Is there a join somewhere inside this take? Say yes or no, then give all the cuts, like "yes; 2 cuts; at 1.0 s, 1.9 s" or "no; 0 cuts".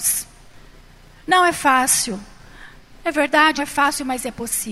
yes; 1 cut; at 3.6 s